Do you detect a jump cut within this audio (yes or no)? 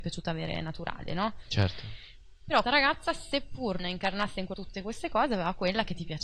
yes